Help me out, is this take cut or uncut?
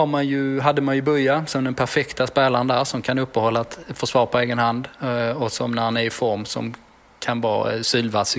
uncut